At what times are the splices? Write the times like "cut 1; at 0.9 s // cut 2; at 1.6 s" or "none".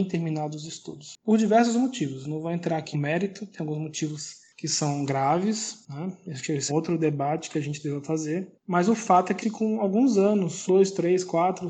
cut 1; at 2.9 s // cut 2; at 6.7 s // cut 3; at 9.4 s // cut 4; at 10.7 s